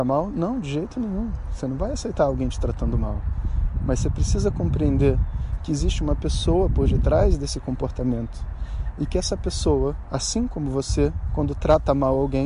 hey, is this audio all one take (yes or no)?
yes